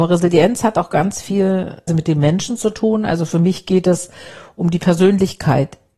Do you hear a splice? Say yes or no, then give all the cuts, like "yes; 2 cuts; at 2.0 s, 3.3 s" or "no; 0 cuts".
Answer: yes; 1 cut; at 1.9 s